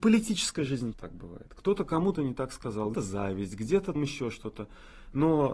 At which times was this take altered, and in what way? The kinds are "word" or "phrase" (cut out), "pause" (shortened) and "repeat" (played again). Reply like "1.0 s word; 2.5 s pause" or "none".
0.9 s word; 2.2 s word; 2.9 s word; 4.0 s word

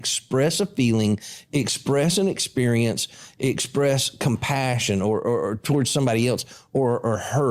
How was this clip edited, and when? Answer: none

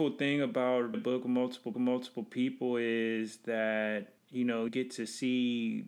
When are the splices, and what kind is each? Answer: 0.9 s word; 1.7 s repeat; 4.2 s pause; 4.7 s word

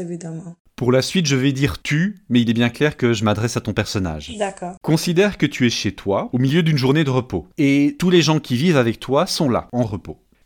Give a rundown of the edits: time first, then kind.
none

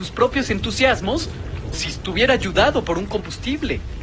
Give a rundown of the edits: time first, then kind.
1.7 s word

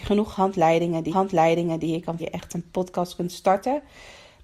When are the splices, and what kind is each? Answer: 1.1 s repeat; 2.2 s phrase

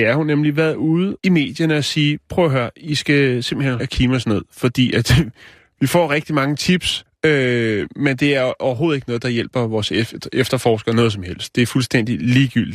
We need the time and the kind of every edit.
1.2 s pause; 3.8 s phrase; 7.1 s word

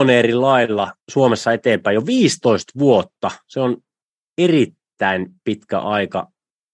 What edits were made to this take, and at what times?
1.0 s pause

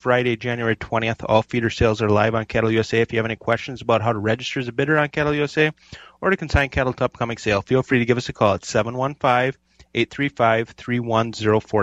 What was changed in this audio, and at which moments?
none

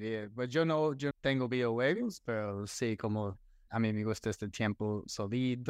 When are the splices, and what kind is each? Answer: 1.1 s word; 3.7 s word

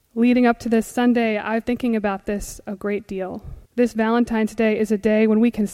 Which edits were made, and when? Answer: 1.6 s word; 3.7 s pause

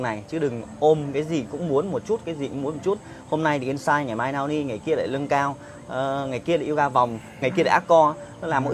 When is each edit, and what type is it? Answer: 7.4 s word

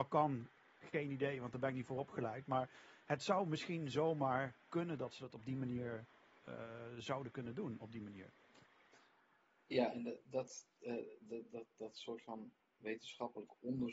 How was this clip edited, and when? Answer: none

